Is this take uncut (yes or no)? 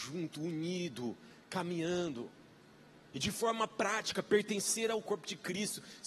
yes